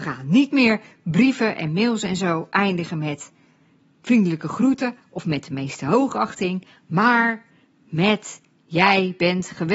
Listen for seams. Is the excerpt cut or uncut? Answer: uncut